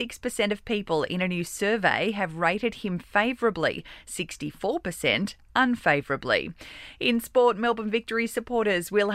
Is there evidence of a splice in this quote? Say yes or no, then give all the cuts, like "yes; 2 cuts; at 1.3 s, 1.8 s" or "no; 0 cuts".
no; 0 cuts